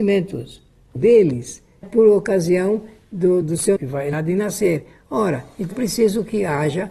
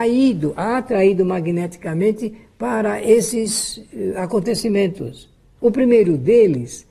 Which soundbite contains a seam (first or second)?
first